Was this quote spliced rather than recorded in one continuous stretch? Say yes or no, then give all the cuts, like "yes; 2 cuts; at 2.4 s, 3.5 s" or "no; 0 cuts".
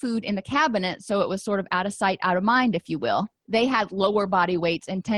yes; 1 cut; at 3.4 s